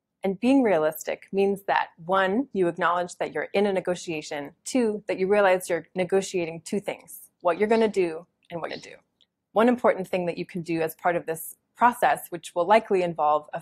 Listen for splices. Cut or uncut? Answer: cut